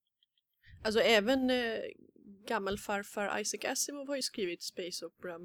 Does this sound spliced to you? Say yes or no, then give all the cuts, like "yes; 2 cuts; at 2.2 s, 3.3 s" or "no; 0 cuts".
no; 0 cuts